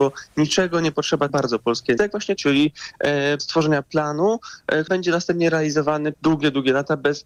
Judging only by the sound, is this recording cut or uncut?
cut